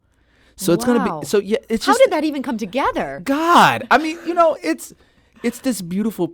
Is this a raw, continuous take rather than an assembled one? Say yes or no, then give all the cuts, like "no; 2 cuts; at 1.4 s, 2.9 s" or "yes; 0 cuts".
yes; 0 cuts